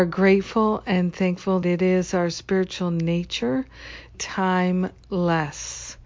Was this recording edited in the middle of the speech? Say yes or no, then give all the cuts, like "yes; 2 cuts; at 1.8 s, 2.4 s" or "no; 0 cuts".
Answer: yes; 2 cuts; at 1.6 s, 4.1 s